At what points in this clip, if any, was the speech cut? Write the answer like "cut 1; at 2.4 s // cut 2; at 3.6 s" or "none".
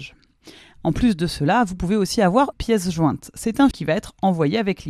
cut 1; at 2.5 s // cut 2; at 3.7 s

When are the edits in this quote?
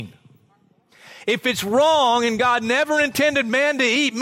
none

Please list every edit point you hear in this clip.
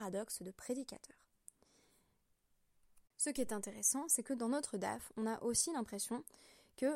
none

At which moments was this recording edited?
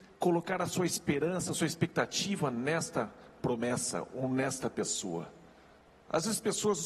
cut 1; at 5.8 s

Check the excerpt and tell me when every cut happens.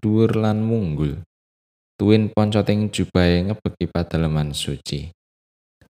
none

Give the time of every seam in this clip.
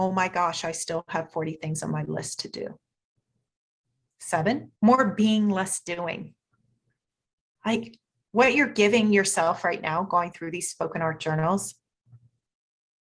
cut 1; at 4.7 s // cut 2; at 8.2 s

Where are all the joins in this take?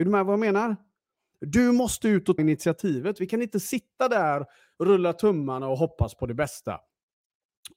cut 1; at 2.4 s

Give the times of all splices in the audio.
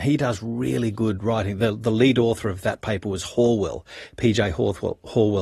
none

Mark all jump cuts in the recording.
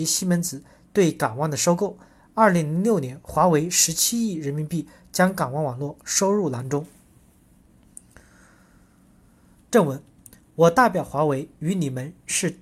none

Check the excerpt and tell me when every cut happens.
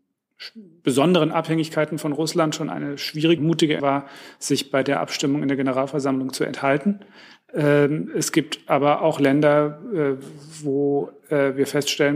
cut 1; at 3.4 s // cut 2; at 3.8 s

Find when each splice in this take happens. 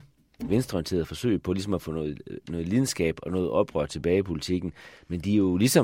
none

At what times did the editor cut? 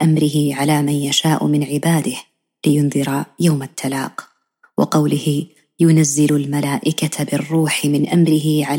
none

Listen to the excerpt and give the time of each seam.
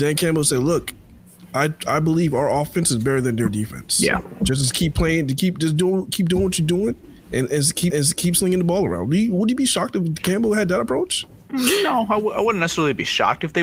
cut 1; at 7.9 s

